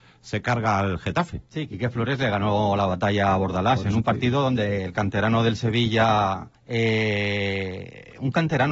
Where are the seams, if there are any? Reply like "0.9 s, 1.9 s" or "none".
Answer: 6.6 s